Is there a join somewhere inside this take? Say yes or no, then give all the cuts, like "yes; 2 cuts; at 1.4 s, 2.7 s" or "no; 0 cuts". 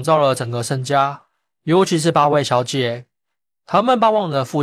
no; 0 cuts